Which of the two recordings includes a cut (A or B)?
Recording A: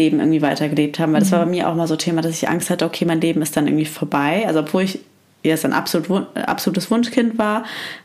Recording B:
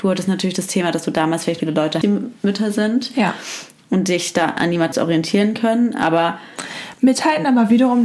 B